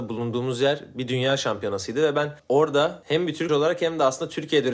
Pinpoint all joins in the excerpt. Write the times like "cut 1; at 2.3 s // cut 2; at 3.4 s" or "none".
cut 1; at 3.5 s